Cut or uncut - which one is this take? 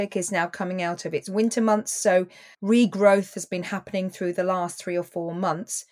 cut